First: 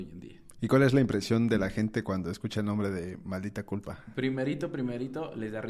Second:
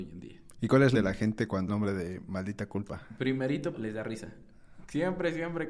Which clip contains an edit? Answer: second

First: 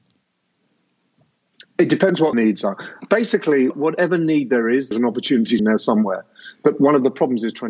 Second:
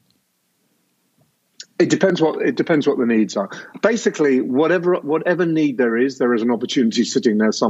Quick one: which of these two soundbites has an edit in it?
first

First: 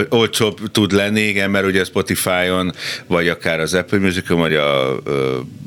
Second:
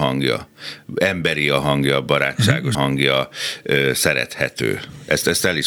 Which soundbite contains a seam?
second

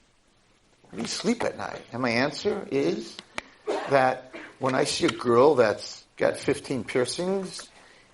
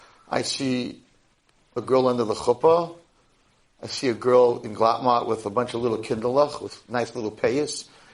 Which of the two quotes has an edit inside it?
first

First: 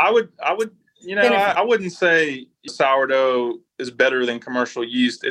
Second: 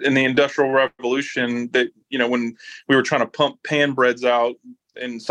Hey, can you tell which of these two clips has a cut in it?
first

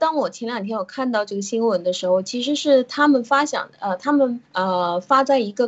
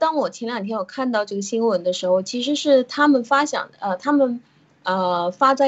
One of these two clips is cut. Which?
first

